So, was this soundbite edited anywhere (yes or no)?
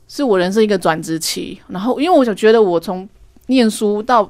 no